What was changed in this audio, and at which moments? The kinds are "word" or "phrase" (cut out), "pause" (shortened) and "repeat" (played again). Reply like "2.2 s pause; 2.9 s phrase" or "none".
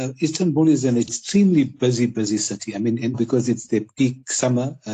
3.1 s word